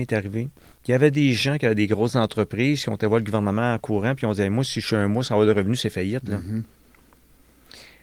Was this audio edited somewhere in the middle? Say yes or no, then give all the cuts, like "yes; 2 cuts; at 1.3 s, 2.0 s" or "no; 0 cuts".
no; 0 cuts